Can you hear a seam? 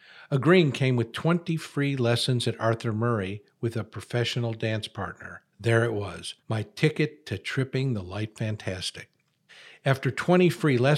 yes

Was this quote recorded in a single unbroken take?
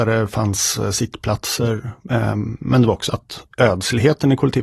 no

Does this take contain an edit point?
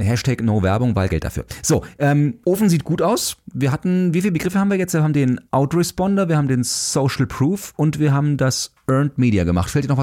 yes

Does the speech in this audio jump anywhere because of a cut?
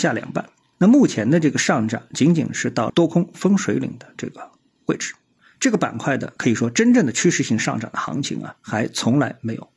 no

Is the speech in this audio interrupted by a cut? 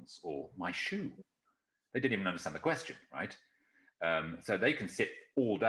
no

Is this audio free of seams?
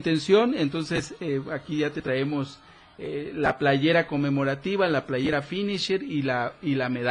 yes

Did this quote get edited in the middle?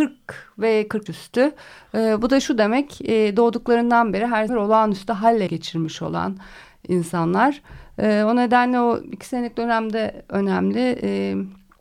yes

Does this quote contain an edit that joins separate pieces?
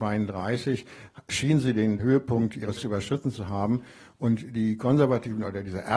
yes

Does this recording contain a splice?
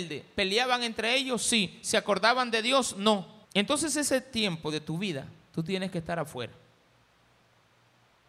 yes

